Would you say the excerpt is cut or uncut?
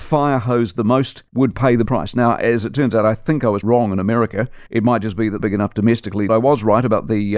cut